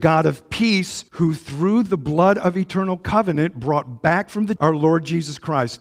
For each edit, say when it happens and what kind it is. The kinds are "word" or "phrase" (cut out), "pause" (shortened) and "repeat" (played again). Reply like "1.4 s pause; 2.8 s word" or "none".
1.1 s pause; 4.6 s word